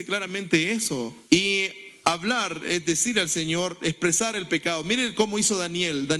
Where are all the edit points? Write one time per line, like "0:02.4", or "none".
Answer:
0:01.2